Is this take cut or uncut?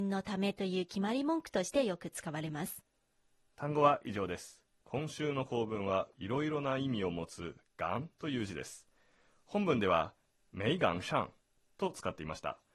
cut